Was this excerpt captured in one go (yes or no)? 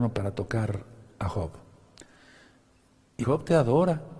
no